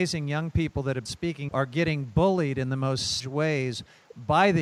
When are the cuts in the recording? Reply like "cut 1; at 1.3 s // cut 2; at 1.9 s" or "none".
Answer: cut 1; at 1.1 s // cut 2; at 1.5 s // cut 3; at 3.2 s